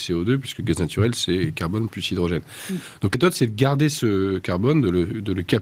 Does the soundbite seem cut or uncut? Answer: cut